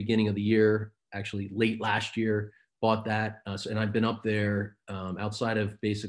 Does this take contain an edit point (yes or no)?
no